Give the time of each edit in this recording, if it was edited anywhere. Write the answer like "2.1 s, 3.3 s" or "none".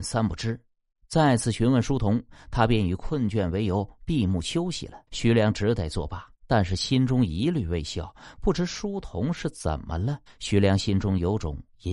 5.1 s, 6.3 s, 10.3 s